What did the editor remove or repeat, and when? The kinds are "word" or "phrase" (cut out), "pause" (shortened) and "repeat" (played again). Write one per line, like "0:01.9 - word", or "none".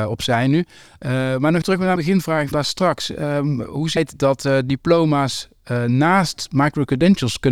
0:01.6 - word
0:02.0 - word
0:02.5 - word
0:04.0 - word